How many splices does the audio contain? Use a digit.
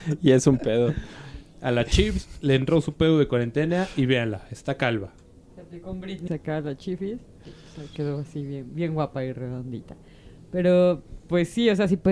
1